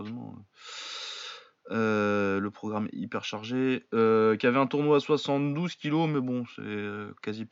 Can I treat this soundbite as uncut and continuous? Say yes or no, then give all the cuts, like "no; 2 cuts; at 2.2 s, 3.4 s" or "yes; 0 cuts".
yes; 0 cuts